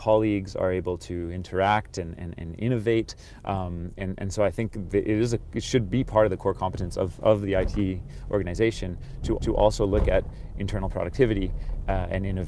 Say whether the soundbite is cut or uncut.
cut